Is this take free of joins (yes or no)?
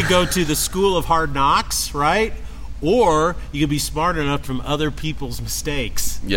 no